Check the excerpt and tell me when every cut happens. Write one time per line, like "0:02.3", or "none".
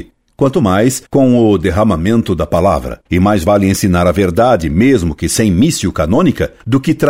0:01.0
0:03.1

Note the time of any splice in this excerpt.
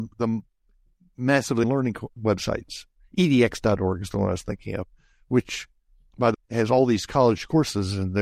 0:01.6
0:02.2
0:06.3

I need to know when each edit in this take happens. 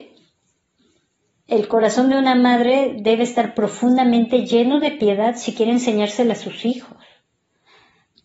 none

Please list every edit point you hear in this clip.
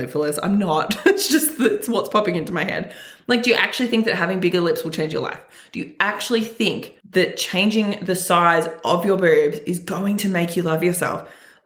0:07.0

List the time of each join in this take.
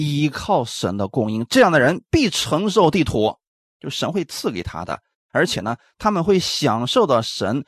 none

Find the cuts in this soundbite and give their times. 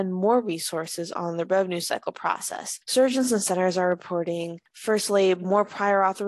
none

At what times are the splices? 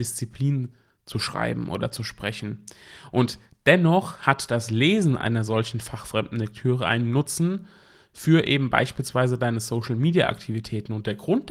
none

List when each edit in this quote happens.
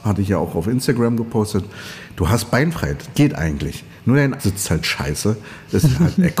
0:03.1
0:04.4

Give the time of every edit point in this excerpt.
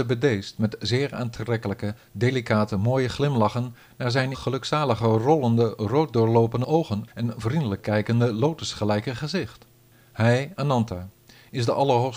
0:04.3
0:09.9

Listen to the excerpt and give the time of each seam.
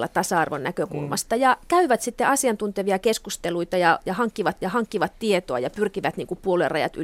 0:04.6

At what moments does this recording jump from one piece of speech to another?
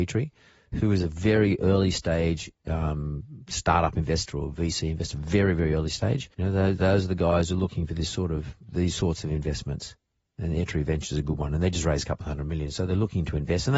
0:02.6
0:06.3
0:08.6

